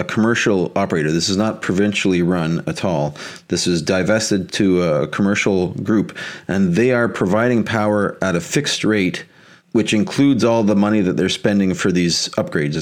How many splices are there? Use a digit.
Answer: 0